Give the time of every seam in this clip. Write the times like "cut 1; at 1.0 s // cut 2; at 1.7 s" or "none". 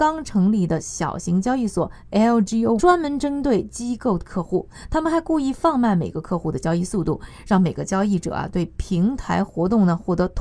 cut 1; at 2.8 s